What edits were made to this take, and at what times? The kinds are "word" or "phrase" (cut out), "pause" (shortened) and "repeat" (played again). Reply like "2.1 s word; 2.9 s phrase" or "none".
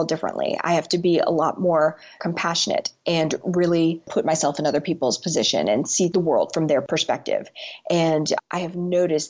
none